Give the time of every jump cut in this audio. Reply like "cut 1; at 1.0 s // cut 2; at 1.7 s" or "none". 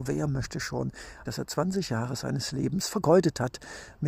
cut 1; at 1.3 s